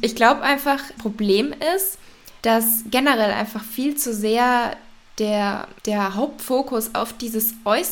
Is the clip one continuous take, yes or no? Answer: no